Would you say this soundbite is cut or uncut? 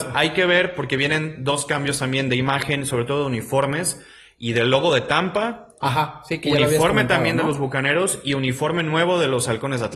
uncut